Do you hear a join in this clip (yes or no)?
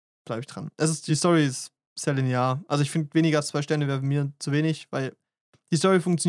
no